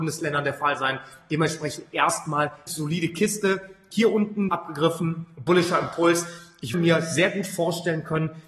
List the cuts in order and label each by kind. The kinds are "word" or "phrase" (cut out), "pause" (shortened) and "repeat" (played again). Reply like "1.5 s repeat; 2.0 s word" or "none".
2.7 s word; 4.5 s word; 6.7 s word